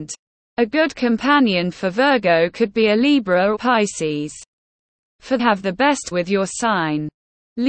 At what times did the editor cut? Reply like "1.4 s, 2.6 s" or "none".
1.7 s, 3.5 s, 5.4 s, 6.1 s